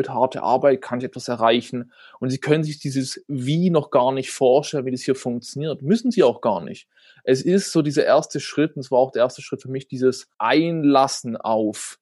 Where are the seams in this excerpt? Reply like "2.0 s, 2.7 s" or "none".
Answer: 10.3 s

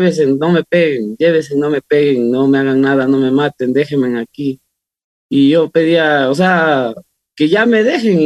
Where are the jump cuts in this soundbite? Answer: none

